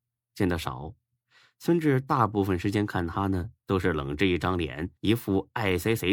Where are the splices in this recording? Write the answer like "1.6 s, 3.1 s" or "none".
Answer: 5.0 s